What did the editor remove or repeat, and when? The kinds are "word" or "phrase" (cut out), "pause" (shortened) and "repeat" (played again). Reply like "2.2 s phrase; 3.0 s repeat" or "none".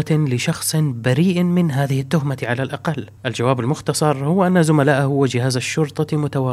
none